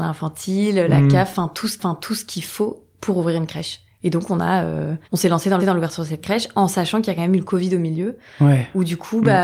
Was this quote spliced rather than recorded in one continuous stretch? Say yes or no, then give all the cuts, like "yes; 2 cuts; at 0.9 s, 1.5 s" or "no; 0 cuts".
yes; 3 cuts; at 1.8 s, 5.0 s, 5.6 s